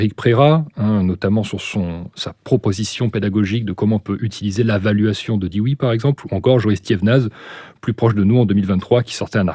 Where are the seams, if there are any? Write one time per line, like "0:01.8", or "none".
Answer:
0:02.4